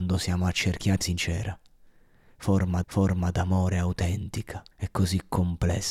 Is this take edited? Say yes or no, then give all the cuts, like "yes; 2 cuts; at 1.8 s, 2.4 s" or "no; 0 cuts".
yes; 3 cuts; at 1.0 s, 2.8 s, 4.7 s